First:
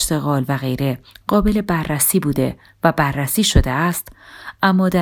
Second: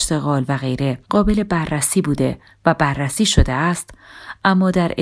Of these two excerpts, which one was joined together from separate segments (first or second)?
second